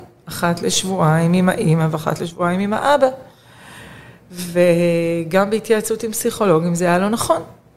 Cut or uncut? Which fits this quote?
uncut